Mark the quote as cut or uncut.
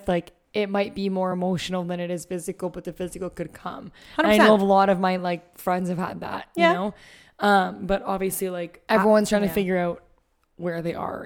uncut